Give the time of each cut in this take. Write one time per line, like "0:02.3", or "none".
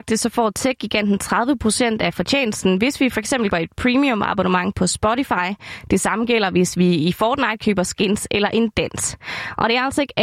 0:03.5